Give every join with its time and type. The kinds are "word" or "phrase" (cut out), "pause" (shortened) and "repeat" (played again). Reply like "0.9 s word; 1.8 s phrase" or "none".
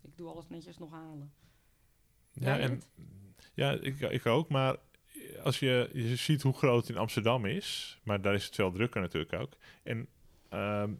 none